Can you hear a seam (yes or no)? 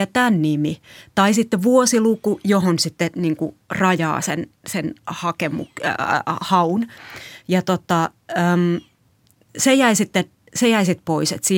no